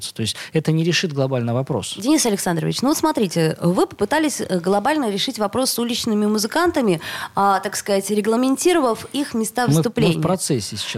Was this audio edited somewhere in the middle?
no; 0 cuts

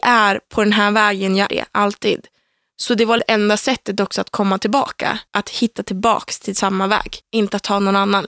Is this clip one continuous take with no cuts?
no; 4 cuts; at 1.5 s, 3.2 s, 5.3 s, 7.2 s

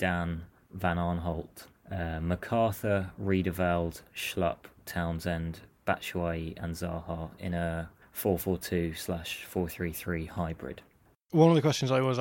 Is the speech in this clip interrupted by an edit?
no; 0 cuts

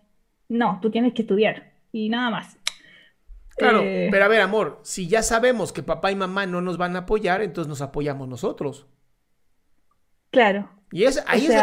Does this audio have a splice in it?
no; 0 cuts

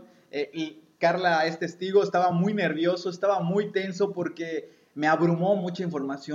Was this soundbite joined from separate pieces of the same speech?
no; 0 cuts

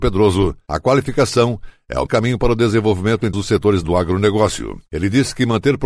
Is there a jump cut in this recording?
yes; 3 cuts; at 2.1 s, 3.3 s, 3.8 s

